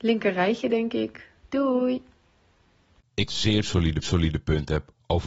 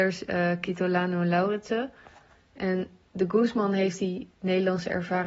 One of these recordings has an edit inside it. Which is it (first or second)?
first